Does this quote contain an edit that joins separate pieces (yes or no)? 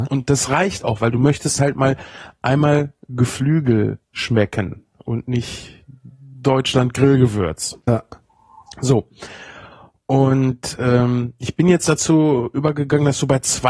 no